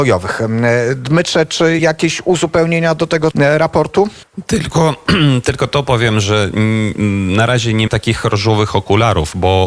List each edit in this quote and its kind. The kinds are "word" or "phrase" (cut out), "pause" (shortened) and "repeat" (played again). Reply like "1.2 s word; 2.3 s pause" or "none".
1.8 s word; 3.3 s word; 7.9 s word